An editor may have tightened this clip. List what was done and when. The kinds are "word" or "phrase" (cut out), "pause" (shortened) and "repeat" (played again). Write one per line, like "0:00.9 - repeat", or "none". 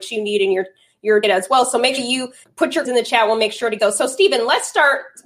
0:01.2 - word
0:02.0 - word
0:02.4 - word
0:02.8 - word
0:03.8 - word